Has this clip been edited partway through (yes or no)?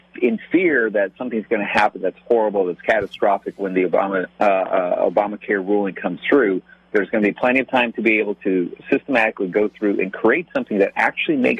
yes